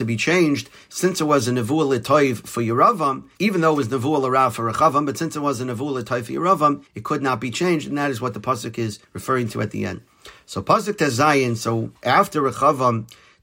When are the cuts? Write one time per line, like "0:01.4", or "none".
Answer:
0:03.3
0:06.9
0:09.0